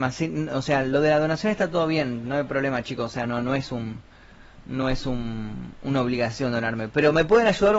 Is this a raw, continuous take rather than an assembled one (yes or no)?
yes